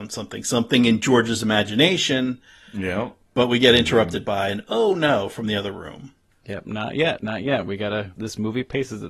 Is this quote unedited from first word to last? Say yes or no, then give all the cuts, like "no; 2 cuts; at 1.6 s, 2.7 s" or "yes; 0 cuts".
no; 1 cut; at 8.1 s